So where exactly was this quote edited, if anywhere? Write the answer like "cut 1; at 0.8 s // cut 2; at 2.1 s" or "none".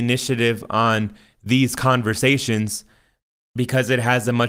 none